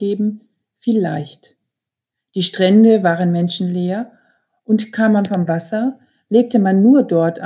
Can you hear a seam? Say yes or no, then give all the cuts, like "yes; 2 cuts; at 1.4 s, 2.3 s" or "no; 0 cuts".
no; 0 cuts